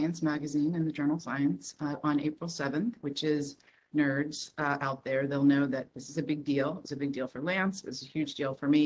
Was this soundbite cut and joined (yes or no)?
yes